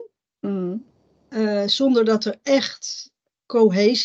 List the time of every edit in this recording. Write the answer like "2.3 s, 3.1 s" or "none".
none

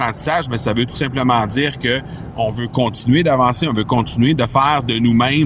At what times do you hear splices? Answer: none

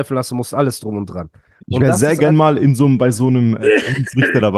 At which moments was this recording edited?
none

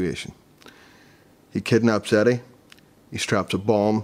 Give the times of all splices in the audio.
none

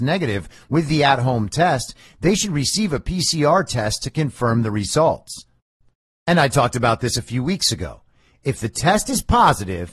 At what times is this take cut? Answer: none

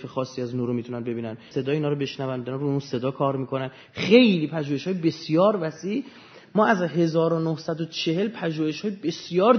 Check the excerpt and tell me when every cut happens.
1.5 s

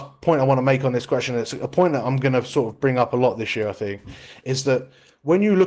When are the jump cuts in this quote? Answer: none

